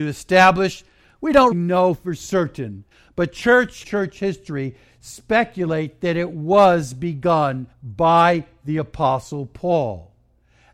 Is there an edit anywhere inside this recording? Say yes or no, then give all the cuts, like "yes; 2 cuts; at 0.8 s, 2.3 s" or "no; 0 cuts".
yes; 4 cuts; at 1.5 s, 2.9 s, 3.8 s, 7.7 s